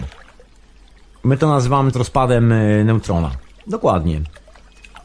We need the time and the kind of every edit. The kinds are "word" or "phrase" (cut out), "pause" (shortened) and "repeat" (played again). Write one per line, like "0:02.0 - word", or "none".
0:01.9 - word